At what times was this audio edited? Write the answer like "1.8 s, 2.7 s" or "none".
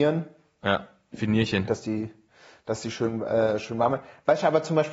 none